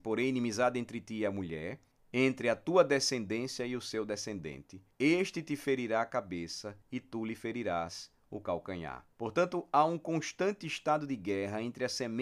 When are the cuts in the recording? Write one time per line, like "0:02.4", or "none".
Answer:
0:01.9
0:04.9
0:06.8
0:09.1